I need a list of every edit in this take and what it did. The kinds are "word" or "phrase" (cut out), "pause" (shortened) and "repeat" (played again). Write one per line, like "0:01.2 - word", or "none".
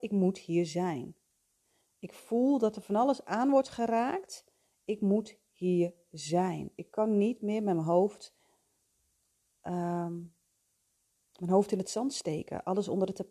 none